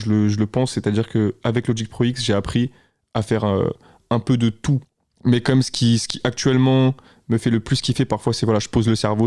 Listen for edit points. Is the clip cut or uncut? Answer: uncut